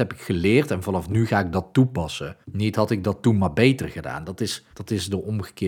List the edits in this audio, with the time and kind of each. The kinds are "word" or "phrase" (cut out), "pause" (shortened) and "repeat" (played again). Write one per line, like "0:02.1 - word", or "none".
0:02.4 - pause
0:04.7 - pause